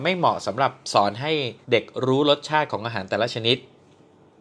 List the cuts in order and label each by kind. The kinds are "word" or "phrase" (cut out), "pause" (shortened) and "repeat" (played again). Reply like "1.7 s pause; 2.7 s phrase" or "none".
1.6 s pause